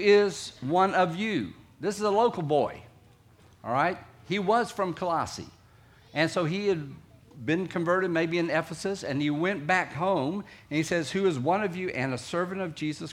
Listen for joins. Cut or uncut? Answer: uncut